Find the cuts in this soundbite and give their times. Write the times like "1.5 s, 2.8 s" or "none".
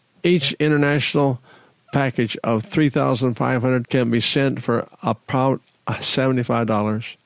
3.8 s